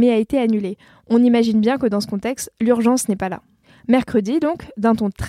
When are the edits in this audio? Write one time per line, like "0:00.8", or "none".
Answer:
none